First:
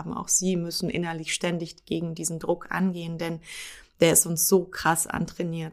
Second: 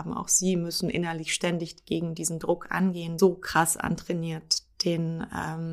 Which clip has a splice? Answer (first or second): second